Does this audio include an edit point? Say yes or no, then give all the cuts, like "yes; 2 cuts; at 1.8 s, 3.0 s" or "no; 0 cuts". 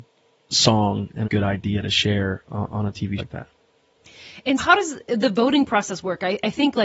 yes; 3 cuts; at 1.2 s, 3.2 s, 4.6 s